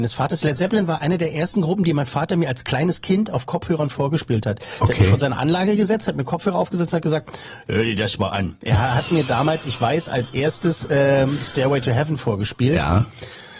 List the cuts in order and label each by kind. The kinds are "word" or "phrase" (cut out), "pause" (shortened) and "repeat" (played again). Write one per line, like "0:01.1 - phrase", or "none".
none